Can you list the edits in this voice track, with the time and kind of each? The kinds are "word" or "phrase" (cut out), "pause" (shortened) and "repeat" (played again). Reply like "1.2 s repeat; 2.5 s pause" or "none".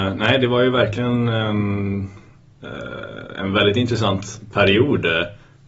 none